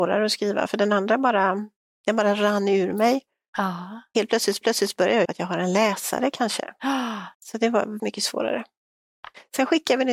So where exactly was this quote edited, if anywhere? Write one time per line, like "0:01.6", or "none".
0:04.6
0:05.3
0:07.3
0:08.0